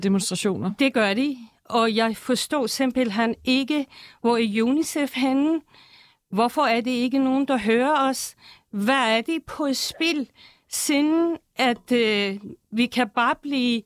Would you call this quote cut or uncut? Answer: uncut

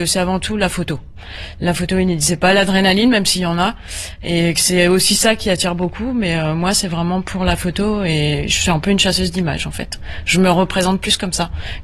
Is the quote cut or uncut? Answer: uncut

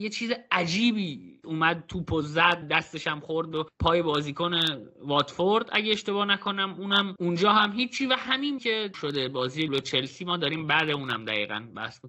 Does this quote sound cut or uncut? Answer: cut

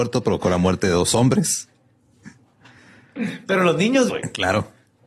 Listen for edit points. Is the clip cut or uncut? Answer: cut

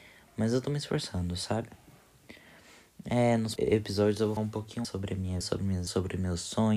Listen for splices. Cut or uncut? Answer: cut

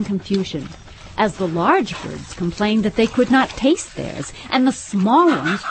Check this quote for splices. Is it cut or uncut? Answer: uncut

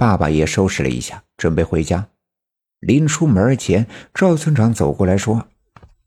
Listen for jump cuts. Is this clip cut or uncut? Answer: uncut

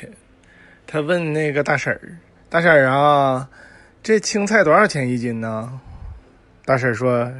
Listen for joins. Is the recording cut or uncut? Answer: uncut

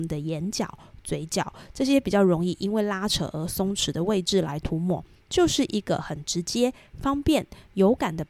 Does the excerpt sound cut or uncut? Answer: uncut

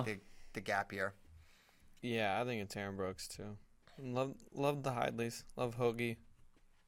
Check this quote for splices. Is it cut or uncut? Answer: uncut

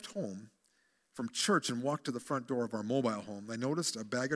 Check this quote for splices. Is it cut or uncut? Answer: uncut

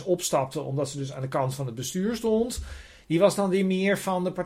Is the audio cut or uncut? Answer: uncut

